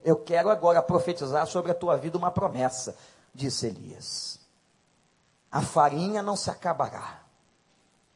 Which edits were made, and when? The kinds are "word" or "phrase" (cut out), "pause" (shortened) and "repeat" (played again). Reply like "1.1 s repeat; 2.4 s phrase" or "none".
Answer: none